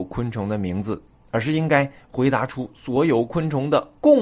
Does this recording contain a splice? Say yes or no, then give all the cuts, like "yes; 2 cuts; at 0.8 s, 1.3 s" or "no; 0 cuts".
no; 0 cuts